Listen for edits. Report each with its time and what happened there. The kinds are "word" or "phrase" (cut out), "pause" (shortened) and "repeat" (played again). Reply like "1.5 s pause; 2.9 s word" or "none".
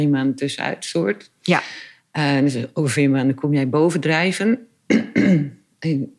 none